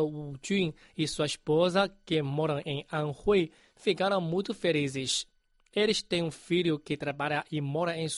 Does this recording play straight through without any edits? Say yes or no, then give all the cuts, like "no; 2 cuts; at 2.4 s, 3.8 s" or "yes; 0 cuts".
yes; 0 cuts